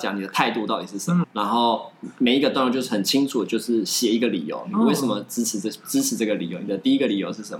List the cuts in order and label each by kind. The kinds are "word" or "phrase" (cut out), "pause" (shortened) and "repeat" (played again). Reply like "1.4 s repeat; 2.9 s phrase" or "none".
1.2 s word